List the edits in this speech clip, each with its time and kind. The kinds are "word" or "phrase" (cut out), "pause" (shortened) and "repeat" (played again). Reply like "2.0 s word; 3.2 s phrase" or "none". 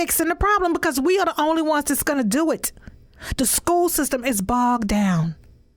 none